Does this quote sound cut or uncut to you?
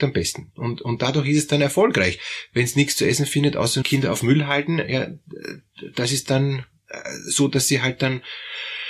cut